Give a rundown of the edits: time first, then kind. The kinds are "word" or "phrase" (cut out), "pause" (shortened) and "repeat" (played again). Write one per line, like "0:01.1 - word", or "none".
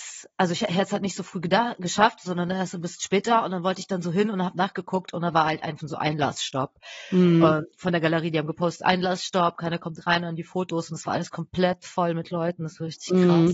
0:05.8 - word